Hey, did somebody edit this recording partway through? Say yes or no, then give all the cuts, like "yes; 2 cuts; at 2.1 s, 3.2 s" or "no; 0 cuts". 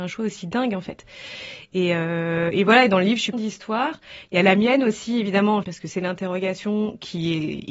yes; 2 cuts; at 3.3 s, 5.6 s